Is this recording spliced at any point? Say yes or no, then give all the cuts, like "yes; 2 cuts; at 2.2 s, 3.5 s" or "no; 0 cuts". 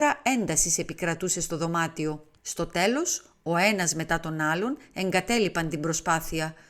yes; 1 cut; at 2.4 s